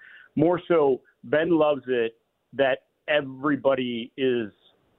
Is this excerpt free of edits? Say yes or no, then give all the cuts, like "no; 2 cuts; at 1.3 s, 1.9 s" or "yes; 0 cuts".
yes; 0 cuts